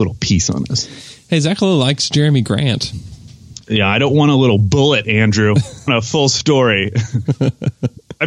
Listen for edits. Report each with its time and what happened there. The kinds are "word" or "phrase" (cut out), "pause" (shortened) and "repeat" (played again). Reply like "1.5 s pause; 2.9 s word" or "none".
3.6 s pause; 5.9 s word